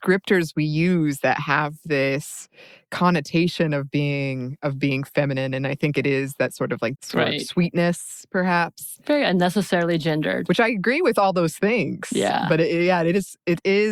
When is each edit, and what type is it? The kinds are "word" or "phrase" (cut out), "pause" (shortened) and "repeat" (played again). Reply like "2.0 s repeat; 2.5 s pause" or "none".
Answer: 7.0 s phrase